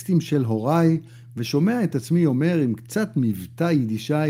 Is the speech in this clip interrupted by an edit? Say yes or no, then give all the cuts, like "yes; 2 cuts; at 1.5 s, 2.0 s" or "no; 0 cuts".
no; 0 cuts